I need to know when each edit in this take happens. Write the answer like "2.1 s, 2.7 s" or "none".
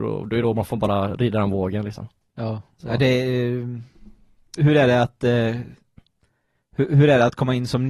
4.6 s